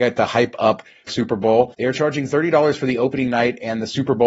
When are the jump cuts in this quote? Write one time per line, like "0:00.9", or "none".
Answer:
0:01.1